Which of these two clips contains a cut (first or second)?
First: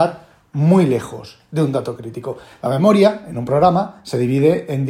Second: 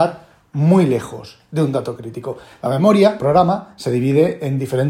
second